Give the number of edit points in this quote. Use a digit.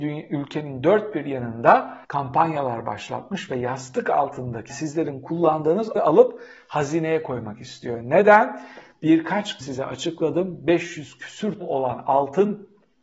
5